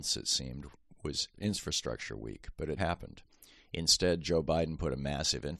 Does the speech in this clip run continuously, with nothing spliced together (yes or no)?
no